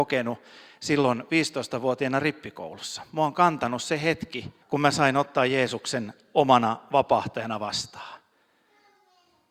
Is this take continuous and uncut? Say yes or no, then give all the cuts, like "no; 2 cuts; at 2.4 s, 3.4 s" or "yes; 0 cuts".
no; 1 cut; at 4.6 s